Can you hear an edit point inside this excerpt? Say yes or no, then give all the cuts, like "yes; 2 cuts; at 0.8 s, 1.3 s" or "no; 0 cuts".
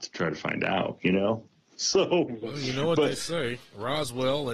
no; 0 cuts